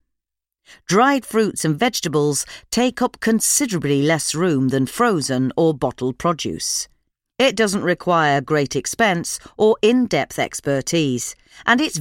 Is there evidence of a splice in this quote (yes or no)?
no